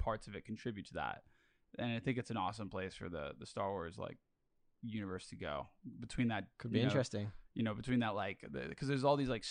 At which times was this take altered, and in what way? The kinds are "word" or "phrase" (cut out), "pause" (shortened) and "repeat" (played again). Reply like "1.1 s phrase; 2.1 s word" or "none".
none